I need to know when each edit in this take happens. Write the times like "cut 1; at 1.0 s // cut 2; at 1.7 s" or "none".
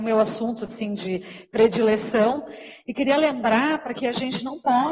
cut 1; at 3.9 s

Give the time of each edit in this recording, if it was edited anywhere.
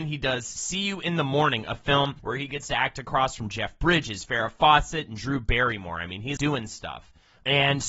cut 1; at 2.2 s // cut 2; at 6.4 s

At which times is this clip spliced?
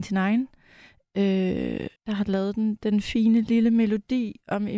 cut 1; at 2.0 s

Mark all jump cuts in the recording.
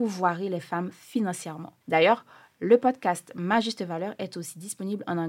cut 1; at 1.8 s

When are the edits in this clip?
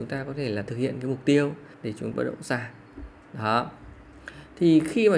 cut 1; at 1.7 s // cut 2; at 2.1 s

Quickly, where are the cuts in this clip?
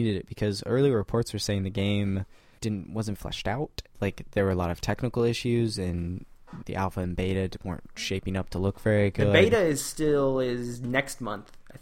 cut 1; at 2.6 s // cut 2; at 3.2 s // cut 3; at 3.9 s // cut 4; at 6.6 s

